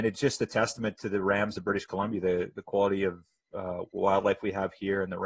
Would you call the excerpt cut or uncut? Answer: uncut